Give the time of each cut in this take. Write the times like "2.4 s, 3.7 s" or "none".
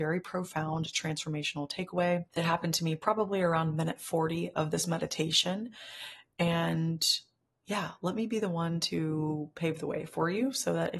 none

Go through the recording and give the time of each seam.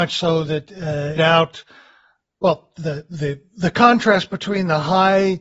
1.2 s

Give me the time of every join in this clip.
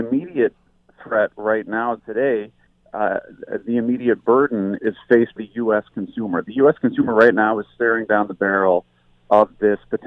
2.0 s, 4.8 s, 5.4 s

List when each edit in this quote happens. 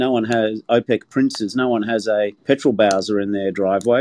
2.4 s

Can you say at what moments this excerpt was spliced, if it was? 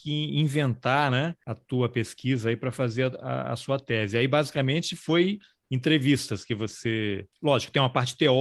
none

